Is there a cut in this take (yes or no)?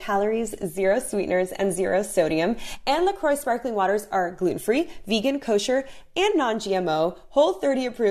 no